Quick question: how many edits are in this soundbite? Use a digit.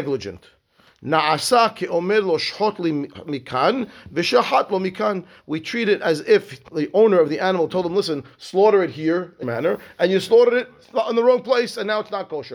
2